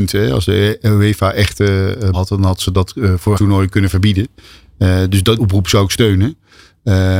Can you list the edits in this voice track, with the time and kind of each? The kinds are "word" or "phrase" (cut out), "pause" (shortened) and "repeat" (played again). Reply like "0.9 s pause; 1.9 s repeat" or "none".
2.1 s word; 3.3 s word; 5.4 s word